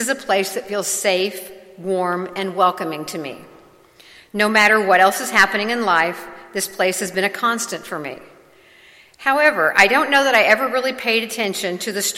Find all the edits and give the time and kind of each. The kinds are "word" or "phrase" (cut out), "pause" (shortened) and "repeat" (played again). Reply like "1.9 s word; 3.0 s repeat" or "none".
none